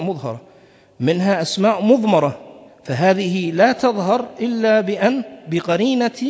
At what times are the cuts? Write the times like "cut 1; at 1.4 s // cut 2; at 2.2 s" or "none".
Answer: cut 1; at 2.7 s

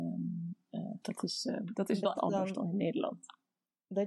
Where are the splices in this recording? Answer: cut 1; at 1.0 s // cut 2; at 2.2 s

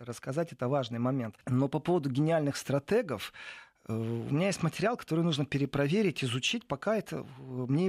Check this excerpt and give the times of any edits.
cut 1; at 1.4 s

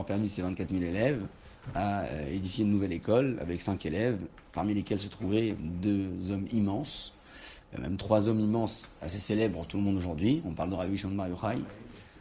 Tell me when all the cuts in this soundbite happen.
none

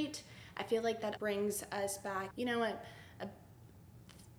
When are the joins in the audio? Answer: cut 1; at 1.2 s // cut 2; at 2.3 s

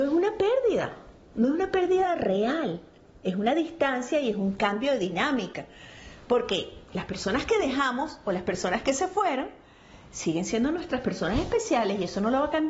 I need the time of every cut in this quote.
none

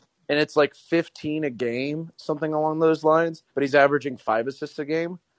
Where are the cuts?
cut 1; at 3.5 s

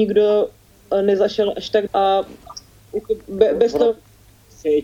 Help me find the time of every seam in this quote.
cut 1; at 1.9 s

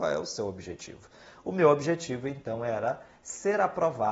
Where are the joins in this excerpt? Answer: none

